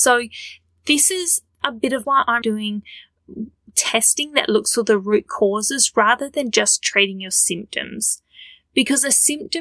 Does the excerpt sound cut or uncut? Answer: cut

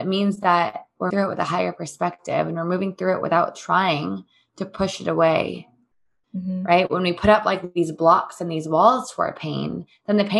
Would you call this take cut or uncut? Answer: cut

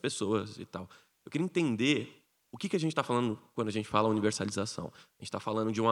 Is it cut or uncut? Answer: uncut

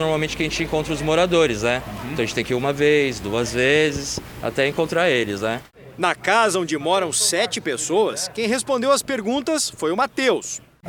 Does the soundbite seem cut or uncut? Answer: uncut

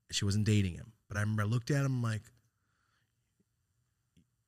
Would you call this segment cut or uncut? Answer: uncut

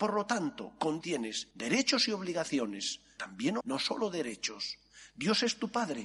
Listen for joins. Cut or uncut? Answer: cut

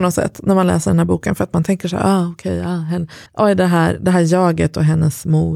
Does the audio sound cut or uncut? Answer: cut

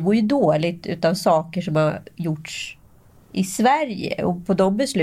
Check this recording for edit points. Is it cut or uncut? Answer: uncut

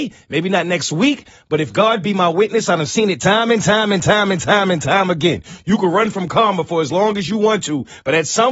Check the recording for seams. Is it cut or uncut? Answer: uncut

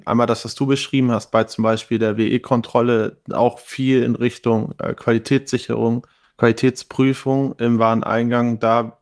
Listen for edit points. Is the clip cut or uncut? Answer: cut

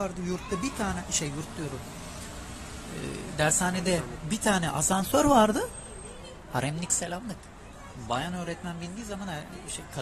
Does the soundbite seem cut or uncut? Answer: uncut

